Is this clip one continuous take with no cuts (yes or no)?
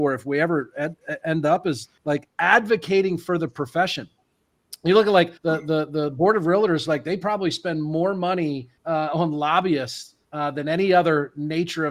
no